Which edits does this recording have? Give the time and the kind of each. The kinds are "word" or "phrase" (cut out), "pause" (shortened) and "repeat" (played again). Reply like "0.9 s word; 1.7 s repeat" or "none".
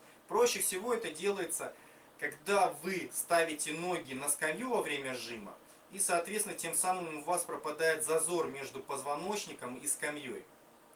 none